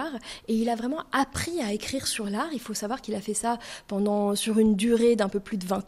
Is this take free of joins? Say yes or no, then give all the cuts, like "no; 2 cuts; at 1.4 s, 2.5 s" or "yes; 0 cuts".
yes; 0 cuts